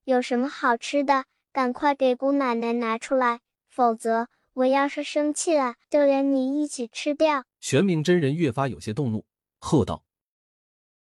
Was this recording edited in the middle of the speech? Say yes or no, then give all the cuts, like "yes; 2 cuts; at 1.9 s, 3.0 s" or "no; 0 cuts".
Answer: yes; 2 cuts; at 5.8 s, 7.5 s